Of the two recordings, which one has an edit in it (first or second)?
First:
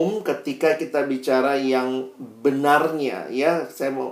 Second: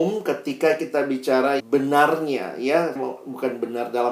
second